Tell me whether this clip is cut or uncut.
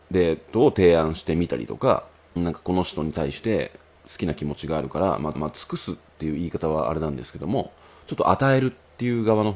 cut